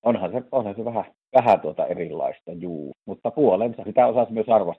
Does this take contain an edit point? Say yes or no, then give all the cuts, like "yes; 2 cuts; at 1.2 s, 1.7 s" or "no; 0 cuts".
yes; 3 cuts; at 1.2 s, 2.9 s, 3.9 s